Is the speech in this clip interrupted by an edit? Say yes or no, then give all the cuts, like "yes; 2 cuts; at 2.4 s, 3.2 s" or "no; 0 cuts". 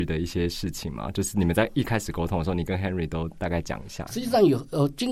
no; 0 cuts